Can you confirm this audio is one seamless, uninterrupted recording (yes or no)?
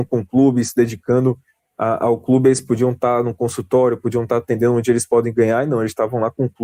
yes